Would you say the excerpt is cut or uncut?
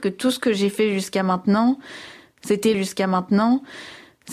cut